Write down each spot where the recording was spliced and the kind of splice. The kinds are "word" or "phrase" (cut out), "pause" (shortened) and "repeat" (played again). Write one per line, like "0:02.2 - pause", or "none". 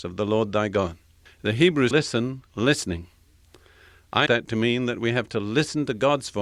0:01.3 - pause
0:01.9 - phrase
0:02.5 - pause
0:04.3 - word